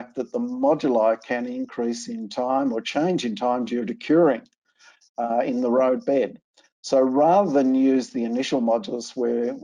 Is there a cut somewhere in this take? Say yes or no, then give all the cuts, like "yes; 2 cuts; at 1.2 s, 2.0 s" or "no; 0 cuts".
no; 0 cuts